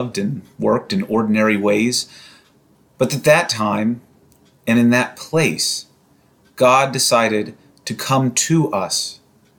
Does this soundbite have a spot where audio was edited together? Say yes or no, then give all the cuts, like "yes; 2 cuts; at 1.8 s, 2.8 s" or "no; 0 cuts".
no; 0 cuts